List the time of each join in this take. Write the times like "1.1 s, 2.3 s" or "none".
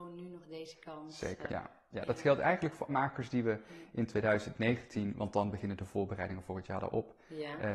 1.5 s, 2.9 s